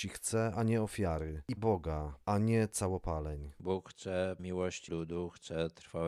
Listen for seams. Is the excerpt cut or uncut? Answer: cut